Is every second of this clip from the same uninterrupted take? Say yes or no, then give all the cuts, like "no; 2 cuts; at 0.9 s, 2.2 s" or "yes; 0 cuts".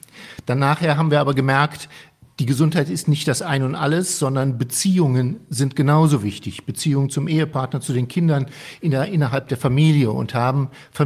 yes; 0 cuts